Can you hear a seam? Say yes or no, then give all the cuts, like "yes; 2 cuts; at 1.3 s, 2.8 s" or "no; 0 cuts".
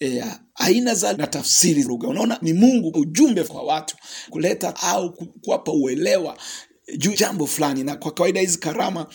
yes; 9 cuts; at 1.1 s, 1.8 s, 2.4 s, 2.9 s, 3.5 s, 4.3 s, 4.7 s, 5.1 s, 7.1 s